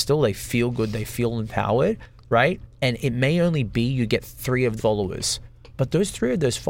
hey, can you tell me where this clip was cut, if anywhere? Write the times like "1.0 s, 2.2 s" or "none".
4.8 s